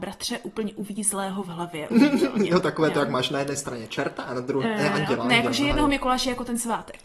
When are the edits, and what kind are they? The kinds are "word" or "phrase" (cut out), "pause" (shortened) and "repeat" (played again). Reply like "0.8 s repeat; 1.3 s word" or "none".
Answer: 1.9 s word; 4.6 s word